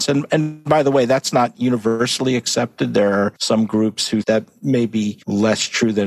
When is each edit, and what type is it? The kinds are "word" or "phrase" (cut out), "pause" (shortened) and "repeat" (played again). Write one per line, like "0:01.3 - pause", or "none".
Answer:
0:04.2 - word